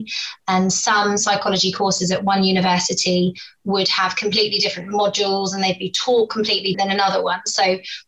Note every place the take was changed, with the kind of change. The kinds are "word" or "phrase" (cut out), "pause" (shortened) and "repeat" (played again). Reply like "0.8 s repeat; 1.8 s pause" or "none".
6.7 s word